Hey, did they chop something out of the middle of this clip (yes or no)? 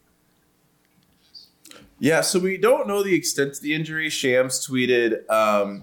no